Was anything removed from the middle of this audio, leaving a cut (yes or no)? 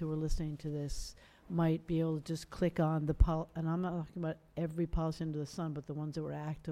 no